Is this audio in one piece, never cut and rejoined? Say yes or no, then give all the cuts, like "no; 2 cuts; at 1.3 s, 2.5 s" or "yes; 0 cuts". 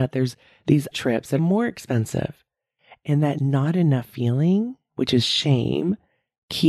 no; 2 cuts; at 0.9 s, 1.4 s